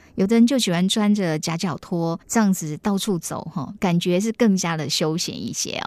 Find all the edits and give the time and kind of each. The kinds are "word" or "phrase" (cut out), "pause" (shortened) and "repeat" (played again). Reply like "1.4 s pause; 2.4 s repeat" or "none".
2.2 s pause

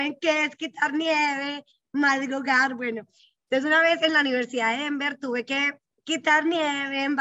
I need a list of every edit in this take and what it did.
none

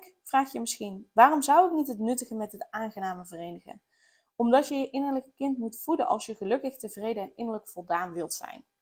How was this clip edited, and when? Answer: none

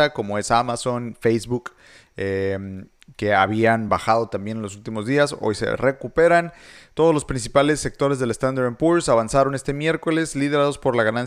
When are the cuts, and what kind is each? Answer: none

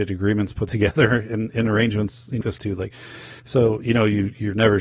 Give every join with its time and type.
2.4 s word; 3.4 s pause

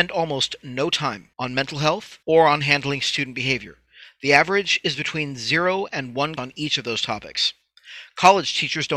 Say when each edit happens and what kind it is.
1.3 s pause; 2.2 s pause; 6.4 s word

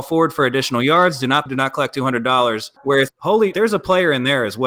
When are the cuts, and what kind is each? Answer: 1.5 s phrase; 2.8 s pause; 3.1 s word; 3.5 s word

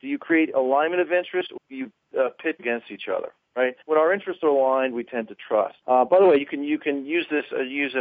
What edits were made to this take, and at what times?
1.6 s word; 2.6 s word; 3.8 s pause; 5.8 s pause

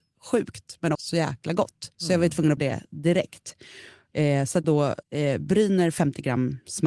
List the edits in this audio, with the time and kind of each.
0.9 s word; 1.9 s pause; 2.6 s word; 4.6 s word; 5.0 s pause

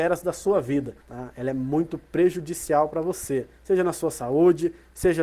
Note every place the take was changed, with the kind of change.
1.0 s pause; 3.5 s pause

